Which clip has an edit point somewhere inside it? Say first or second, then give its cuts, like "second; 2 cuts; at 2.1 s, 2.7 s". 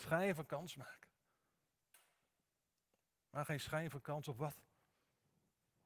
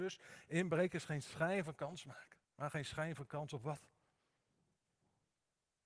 second; 1 cut; at 2.4 s